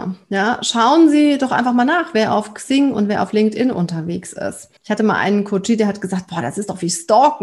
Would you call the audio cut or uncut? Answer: cut